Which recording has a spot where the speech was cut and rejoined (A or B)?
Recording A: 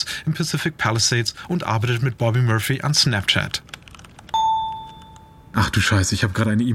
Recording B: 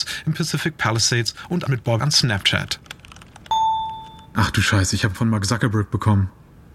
B